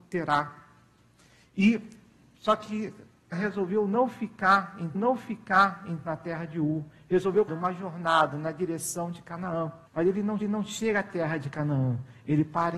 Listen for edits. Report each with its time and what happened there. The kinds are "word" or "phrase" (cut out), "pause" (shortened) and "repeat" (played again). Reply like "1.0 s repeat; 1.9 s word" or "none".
3.3 s word; 4.9 s repeat; 7.5 s phrase; 9.9 s pause; 10.4 s repeat